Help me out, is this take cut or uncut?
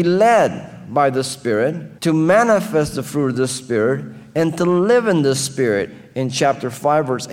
cut